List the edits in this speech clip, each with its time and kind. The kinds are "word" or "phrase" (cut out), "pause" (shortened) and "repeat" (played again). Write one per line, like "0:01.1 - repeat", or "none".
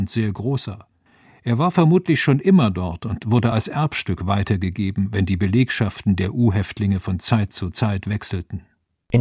none